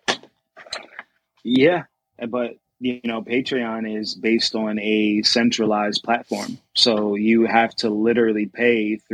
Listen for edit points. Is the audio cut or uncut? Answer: uncut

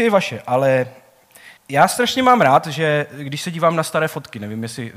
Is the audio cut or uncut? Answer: cut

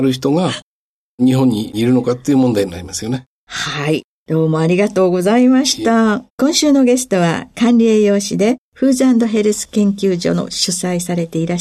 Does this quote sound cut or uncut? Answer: cut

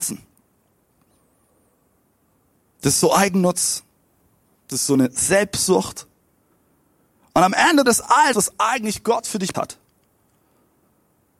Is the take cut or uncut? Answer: cut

